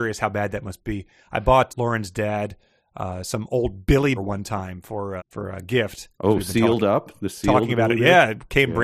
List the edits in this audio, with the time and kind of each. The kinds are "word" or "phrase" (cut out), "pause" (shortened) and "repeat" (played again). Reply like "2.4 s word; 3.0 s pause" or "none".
1.7 s word; 4.2 s word; 5.2 s word